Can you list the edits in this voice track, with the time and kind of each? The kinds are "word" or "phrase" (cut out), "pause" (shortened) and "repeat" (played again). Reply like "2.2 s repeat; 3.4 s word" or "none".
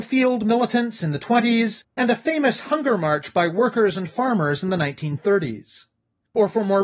none